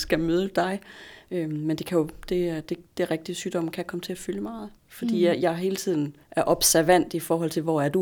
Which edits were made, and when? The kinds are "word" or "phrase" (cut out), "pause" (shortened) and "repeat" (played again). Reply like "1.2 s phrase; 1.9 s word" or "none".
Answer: 2.9 s pause; 4.8 s pause; 6.2 s pause